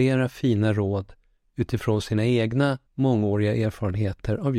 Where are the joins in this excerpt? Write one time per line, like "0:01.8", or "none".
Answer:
0:02.9